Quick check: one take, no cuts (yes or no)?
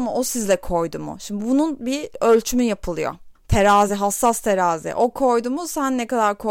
yes